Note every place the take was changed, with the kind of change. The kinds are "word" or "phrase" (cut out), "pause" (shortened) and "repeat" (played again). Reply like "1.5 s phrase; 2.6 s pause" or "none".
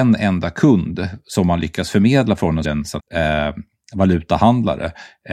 2.6 s phrase; 3.0 s word